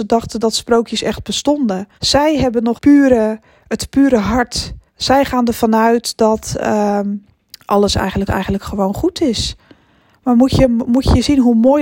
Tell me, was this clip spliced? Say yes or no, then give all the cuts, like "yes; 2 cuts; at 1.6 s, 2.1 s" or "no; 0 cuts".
yes; 5 cuts; at 1.9 s, 2.8 s, 4.9 s, 7.3 s, 8.3 s